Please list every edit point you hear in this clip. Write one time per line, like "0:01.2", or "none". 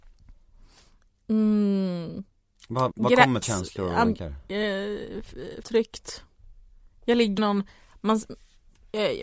0:02.9
0:03.4
0:04.0
0:05.6
0:07.4